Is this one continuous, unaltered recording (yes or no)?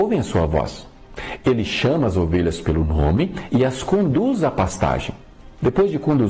yes